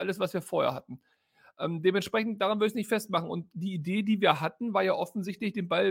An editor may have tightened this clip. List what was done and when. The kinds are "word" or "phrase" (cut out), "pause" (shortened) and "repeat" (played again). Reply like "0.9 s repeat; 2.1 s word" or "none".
none

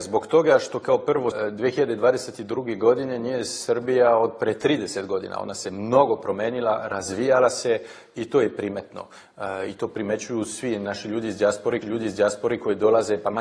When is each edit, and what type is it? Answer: 1.3 s word; 11.8 s repeat

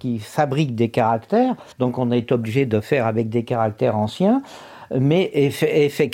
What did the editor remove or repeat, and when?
1.7 s pause

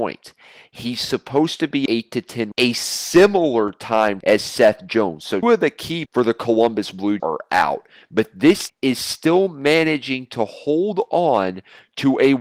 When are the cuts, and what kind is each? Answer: 1.9 s word; 2.5 s word; 4.2 s word; 5.4 s word; 6.1 s word; 7.2 s word; 8.7 s word

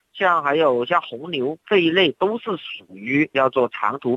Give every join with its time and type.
none

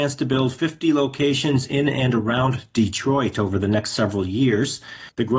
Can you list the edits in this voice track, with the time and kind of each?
none

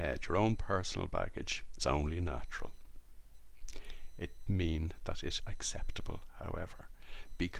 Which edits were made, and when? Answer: 1.8 s word; 4.5 s word; 5.4 s word

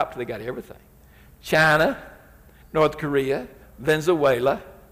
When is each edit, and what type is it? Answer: 3.6 s word

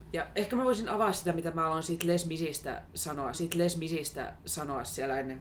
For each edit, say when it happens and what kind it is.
3.3 s repeat

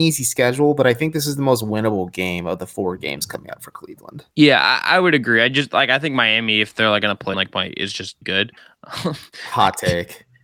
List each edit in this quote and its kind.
4.3 s pause; 7.3 s word; 8.2 s word; 8.6 s pause

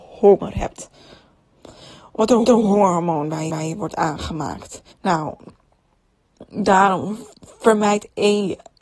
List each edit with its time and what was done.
2.4 s repeat; 3.5 s repeat; 4.9 s pause

